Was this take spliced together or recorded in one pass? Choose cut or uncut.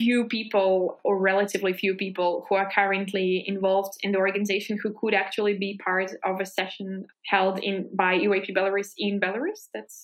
cut